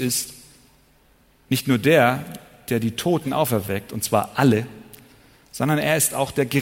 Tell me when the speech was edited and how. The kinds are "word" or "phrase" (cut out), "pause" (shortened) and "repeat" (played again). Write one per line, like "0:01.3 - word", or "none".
none